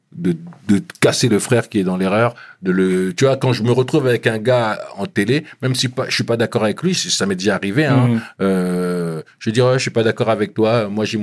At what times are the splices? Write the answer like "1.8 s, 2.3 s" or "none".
none